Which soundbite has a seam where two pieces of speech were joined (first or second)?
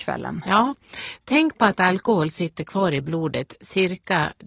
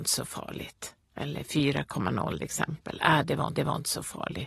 second